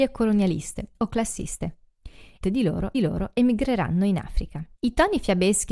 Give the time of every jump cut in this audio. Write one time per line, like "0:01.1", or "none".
0:00.9
0:02.4
0:02.9
0:04.8